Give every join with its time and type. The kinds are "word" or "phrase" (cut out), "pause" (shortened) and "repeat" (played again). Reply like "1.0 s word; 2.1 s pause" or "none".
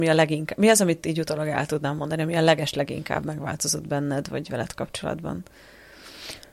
none

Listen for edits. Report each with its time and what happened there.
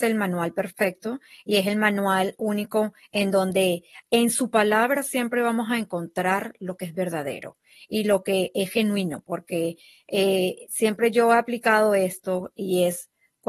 none

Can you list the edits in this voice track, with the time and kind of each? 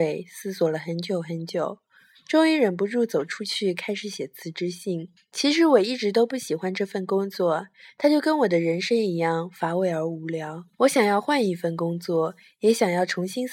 5.2 s pause; 10.7 s pause

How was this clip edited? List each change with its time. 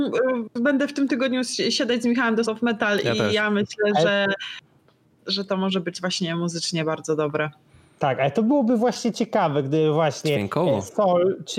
2.5 s word

